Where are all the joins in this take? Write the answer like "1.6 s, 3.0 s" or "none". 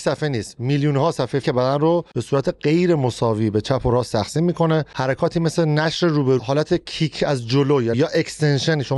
1.4 s, 6.4 s, 7.9 s